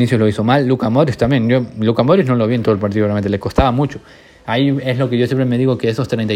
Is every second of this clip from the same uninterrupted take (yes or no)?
yes